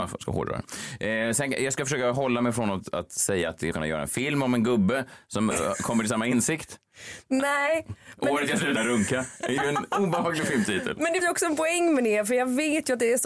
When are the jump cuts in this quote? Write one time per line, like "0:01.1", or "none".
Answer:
0:03.7
0:05.5
0:08.8
0:11.2